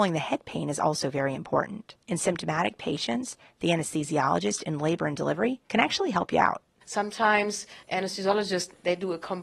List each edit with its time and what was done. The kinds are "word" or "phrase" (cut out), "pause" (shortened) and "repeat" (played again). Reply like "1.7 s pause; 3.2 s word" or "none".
2.0 s pause; 5.7 s pause